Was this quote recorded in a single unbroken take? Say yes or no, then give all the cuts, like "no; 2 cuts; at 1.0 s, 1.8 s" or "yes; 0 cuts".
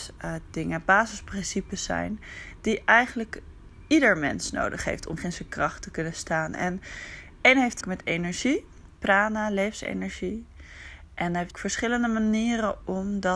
no; 4 cuts; at 5.2 s, 7.8 s, 9.0 s, 11.5 s